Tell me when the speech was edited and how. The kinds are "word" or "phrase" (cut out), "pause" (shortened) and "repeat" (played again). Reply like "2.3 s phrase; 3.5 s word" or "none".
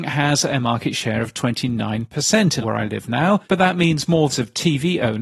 2.6 s word; 3.4 s pause; 4.3 s phrase